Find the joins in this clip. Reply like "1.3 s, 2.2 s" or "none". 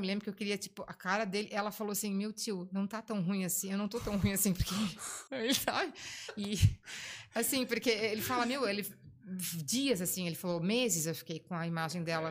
5.3 s